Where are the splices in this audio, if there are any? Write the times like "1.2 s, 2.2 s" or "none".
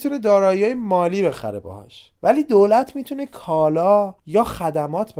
2.2 s, 4.2 s